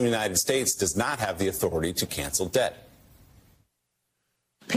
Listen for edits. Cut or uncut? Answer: uncut